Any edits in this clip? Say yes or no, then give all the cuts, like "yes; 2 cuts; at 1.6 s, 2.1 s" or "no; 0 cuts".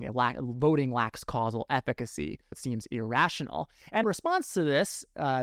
yes; 2 cuts; at 2.5 s, 4.0 s